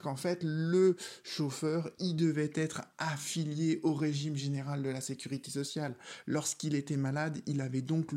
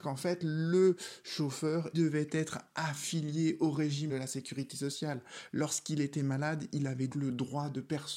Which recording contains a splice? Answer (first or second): second